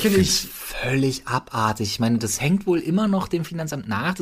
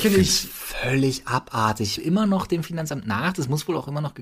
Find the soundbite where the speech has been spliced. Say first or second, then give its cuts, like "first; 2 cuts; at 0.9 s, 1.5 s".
second; 1 cut; at 2.0 s